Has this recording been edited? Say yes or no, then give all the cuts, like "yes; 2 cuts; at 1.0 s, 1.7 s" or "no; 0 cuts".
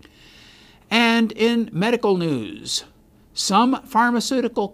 no; 0 cuts